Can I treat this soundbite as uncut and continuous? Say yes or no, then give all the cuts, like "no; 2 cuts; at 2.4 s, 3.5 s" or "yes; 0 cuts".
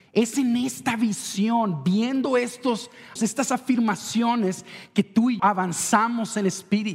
no; 2 cuts; at 3.2 s, 5.4 s